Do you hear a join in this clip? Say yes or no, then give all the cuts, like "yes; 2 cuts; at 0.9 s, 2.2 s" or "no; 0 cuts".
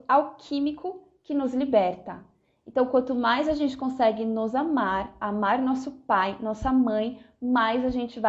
no; 0 cuts